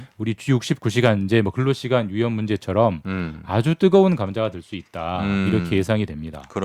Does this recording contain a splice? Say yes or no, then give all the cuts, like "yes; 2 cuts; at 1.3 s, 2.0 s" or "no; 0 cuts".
no; 0 cuts